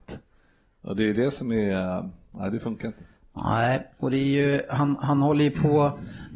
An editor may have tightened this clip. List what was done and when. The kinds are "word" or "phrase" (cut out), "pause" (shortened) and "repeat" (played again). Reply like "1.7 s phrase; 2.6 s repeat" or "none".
none